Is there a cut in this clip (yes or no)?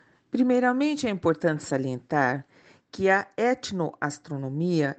no